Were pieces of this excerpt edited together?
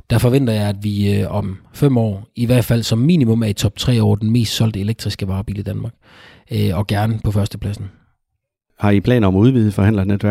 no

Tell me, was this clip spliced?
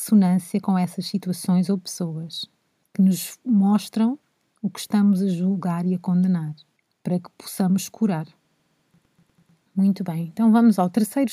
no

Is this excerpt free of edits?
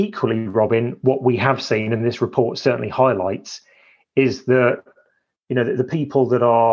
yes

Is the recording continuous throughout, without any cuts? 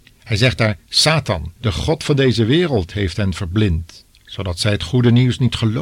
no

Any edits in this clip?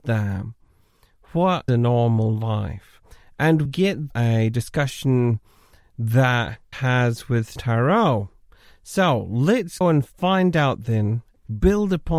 yes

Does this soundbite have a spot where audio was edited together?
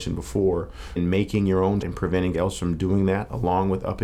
yes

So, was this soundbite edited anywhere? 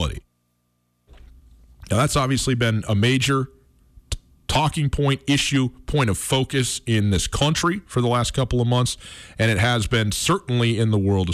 no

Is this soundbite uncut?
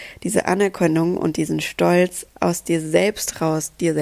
no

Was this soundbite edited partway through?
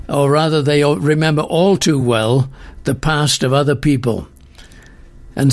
no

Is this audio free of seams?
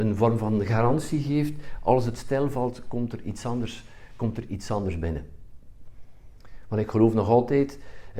yes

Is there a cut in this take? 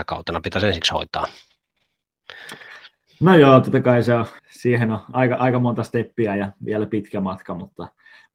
yes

